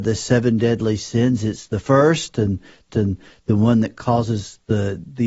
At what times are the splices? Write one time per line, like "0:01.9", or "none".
0:02.9